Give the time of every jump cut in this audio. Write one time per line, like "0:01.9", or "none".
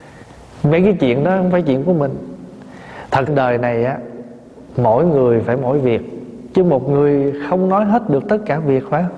0:03.3

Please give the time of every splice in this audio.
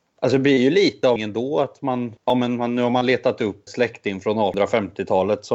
0:01.2
0:02.2
0:03.7

